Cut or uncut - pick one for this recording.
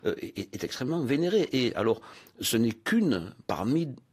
uncut